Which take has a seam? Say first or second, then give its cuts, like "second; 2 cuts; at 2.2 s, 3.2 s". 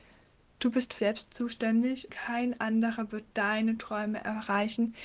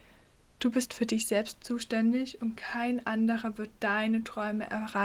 first; 2 cuts; at 1.0 s, 2.1 s